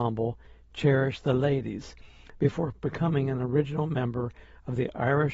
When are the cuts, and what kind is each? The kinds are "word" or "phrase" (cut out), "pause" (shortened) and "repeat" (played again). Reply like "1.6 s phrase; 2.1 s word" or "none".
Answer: none